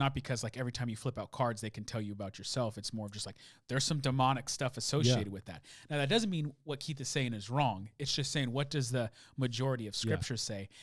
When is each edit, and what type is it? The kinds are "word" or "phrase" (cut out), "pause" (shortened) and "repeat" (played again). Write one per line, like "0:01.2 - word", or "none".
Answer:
none